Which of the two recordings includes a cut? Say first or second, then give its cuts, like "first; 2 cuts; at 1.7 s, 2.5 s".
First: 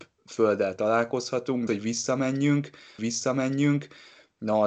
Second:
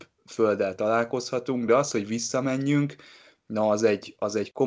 first; 2 cuts; at 1.7 s, 3.0 s